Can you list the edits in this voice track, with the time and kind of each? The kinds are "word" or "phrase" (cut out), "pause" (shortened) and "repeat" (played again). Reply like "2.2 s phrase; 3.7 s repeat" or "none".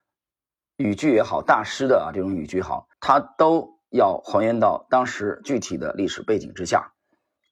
2.9 s pause